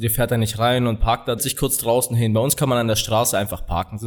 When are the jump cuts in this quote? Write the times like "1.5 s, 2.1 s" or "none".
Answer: 1.4 s